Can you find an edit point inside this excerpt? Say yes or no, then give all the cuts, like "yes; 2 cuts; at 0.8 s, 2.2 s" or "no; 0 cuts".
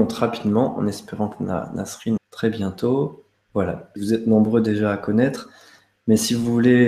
yes; 3 cuts; at 2.2 s, 3.3 s, 4.0 s